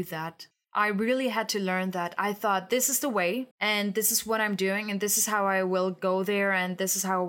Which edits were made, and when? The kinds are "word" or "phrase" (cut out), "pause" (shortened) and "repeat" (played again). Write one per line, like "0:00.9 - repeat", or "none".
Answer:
0:03.5 - pause